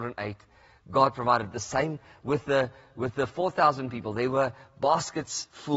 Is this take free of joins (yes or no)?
yes